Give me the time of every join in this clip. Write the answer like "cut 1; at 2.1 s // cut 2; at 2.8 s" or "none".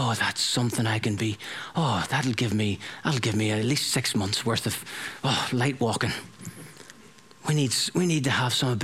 none

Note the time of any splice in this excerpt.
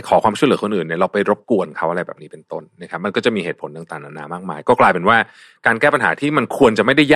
none

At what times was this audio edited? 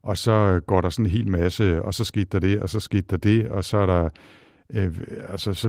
none

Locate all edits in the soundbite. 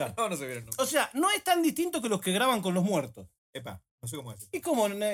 cut 1; at 3.4 s

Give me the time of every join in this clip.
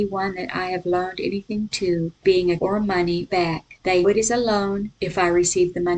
cut 1; at 2.2 s // cut 2; at 2.6 s // cut 3; at 3.3 s // cut 4; at 4.0 s

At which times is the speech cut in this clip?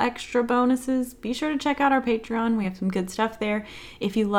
none

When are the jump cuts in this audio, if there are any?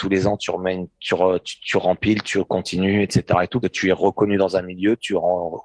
cut 1; at 1.0 s // cut 2; at 3.6 s

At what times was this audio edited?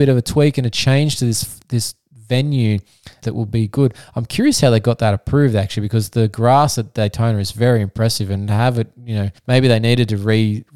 cut 1; at 3.2 s // cut 2; at 9.4 s

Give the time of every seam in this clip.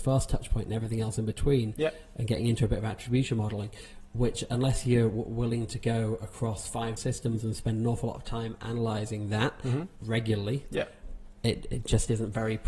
cut 1; at 7.0 s

